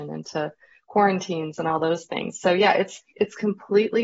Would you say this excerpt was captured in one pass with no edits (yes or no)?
no